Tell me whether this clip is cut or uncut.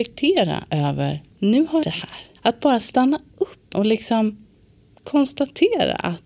cut